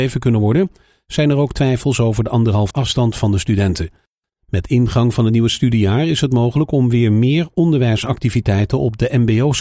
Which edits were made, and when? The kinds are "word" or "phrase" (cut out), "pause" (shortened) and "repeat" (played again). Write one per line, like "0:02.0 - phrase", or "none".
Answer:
0:02.7 - word